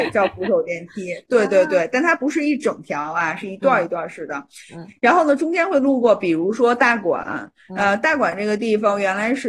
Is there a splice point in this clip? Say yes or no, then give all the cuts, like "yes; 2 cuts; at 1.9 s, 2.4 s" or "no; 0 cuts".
no; 0 cuts